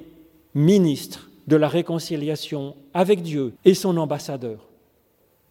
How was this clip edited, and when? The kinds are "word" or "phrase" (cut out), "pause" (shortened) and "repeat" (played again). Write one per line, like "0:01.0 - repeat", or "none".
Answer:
0:03.6 - pause